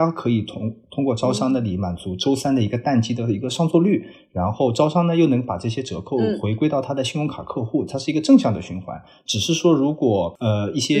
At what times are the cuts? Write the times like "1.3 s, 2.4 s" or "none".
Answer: none